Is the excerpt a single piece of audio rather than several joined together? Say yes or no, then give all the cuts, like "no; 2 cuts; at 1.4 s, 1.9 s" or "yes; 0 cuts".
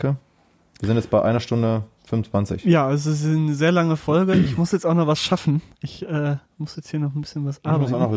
yes; 0 cuts